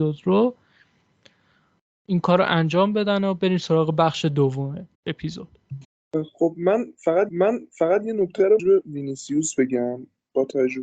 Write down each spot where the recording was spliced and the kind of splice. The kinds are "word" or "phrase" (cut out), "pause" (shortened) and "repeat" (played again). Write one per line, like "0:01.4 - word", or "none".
0:04.9 - pause
0:07.3 - repeat
0:08.6 - phrase

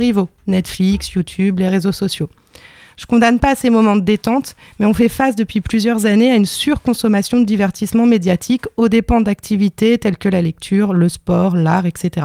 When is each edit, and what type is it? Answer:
none

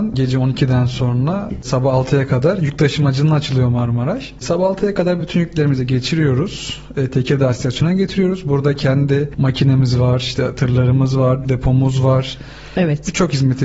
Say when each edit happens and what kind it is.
none

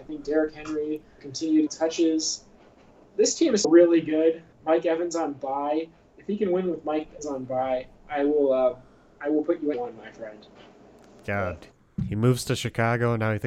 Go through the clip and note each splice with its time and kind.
0:01.2 - word
0:01.7 - phrase
0:03.6 - word
0:04.5 - pause
0:07.2 - word
0:09.7 - phrase

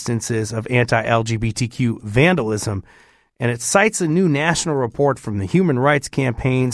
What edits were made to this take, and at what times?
none

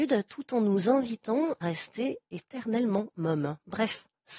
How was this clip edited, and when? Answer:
0:01.6 - word

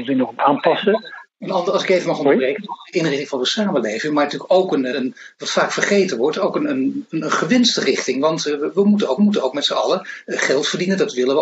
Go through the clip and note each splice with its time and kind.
0:01.3 - pause
0:04.9 - word
0:09.2 - repeat

